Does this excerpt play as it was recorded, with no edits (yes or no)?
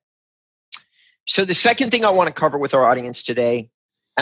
yes